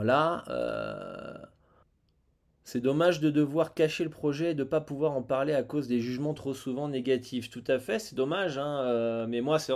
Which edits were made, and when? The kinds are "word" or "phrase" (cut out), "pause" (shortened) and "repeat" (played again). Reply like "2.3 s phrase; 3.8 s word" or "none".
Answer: 1.8 s pause